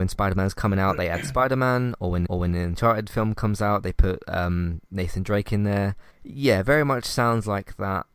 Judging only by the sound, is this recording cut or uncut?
cut